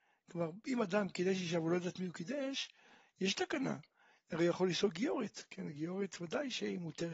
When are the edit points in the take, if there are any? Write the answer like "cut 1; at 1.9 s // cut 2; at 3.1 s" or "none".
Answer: none